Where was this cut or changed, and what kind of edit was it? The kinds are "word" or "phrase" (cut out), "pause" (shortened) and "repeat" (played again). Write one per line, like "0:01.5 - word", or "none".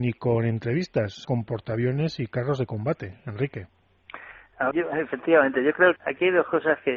0:01.2 - word
0:04.7 - word
0:06.0 - word